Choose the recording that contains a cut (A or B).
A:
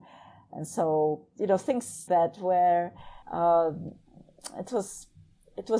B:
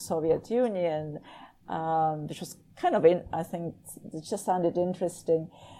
A